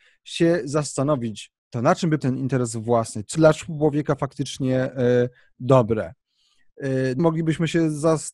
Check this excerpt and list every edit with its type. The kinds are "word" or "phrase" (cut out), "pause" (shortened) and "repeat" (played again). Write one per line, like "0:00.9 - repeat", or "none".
0:01.6 - word
0:02.2 - word
0:03.4 - word
0:07.2 - word